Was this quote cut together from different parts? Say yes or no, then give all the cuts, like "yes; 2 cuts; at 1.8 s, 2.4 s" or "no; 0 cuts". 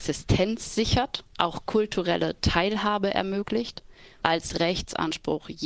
yes; 2 cuts; at 1.3 s, 4.2 s